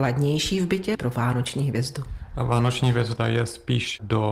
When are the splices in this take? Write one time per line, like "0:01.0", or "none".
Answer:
0:00.9